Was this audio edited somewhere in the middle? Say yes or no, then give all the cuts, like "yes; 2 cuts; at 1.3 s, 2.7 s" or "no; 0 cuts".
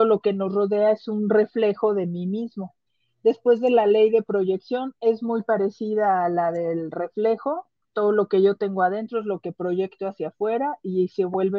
yes; 1 cut; at 2.9 s